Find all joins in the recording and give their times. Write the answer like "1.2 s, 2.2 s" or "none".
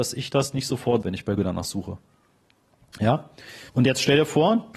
1.0 s, 1.4 s, 3.7 s